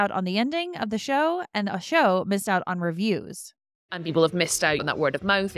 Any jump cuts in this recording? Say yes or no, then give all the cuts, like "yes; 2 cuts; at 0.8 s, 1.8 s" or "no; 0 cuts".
no; 0 cuts